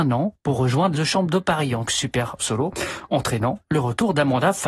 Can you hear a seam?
yes; 3 cuts; at 0.9 s, 1.9 s, 2.4 s

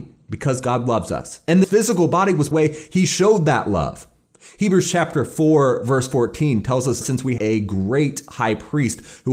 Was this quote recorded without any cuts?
no; 4 cuts; at 1.6 s, 2.5 s, 7.0 s, 7.4 s

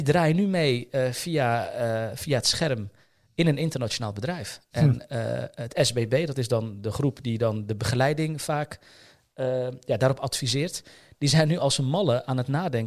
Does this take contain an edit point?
no; 0 cuts

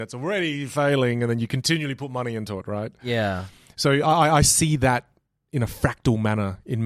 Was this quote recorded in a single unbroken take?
yes; 0 cuts

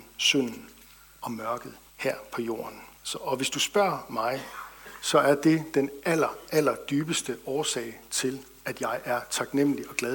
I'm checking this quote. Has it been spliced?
yes; 2 cuts; at 1.9 s, 2.9 s

